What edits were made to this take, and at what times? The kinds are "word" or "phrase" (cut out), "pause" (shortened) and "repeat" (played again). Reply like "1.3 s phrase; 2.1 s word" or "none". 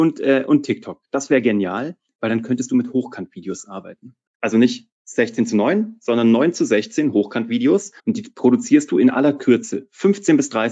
4.3 s pause; 8.0 s pause